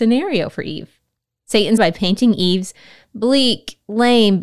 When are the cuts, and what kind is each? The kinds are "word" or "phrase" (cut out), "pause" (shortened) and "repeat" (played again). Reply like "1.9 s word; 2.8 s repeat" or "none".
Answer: 1.8 s word

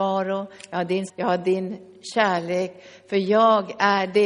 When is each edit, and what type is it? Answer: 1.1 s word

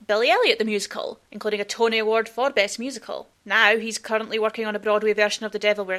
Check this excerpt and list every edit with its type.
1.3 s pause; 3.3 s pause

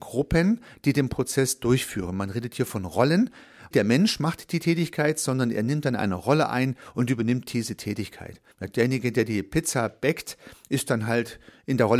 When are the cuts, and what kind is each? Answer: 3.7 s phrase; 8.5 s pause

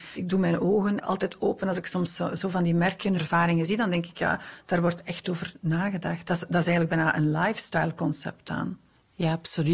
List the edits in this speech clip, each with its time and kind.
none

